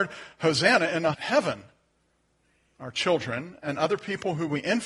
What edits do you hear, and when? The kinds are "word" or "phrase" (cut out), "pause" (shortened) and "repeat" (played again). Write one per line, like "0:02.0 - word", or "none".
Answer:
0:01.1 - word

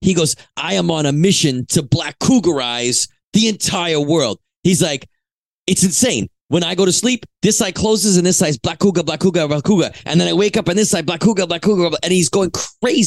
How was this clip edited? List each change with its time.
none

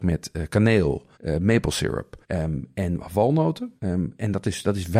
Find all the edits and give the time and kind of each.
0:01.1 - pause
0:02.2 - pause
0:03.8 - pause

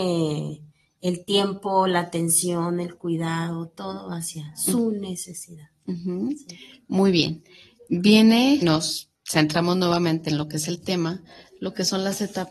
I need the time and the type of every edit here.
0:08.6 - word
0:09.1 - pause

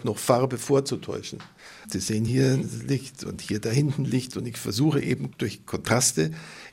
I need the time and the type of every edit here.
none

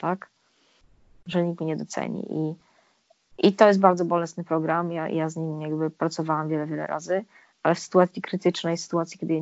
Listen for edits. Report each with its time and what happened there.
none

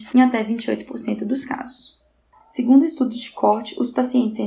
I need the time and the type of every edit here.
0:02.3 - pause

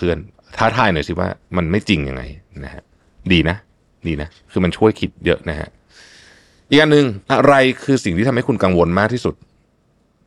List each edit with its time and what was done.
0:07.2 - pause

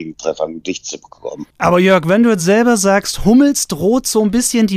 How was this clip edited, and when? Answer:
none

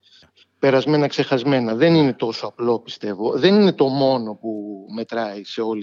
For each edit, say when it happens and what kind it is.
none

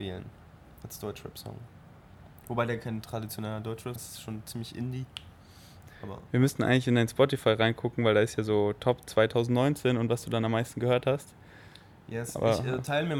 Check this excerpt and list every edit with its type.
0:04.0 - word

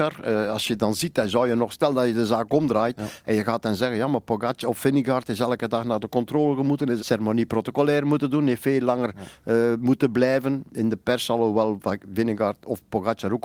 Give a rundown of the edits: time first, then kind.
0:07.0 - phrase

